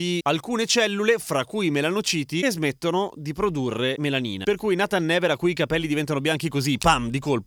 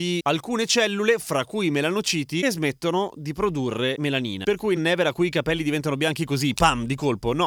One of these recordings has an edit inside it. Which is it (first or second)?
second